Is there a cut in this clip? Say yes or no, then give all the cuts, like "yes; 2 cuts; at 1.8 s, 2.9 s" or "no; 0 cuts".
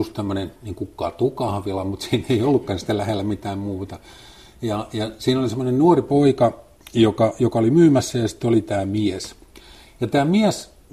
no; 0 cuts